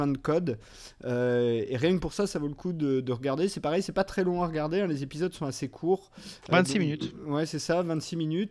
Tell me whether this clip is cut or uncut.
uncut